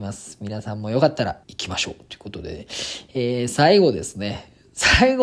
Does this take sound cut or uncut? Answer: cut